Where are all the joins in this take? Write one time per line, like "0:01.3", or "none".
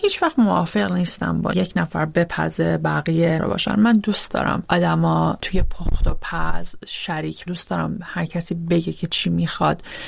0:01.5
0:03.4
0:07.5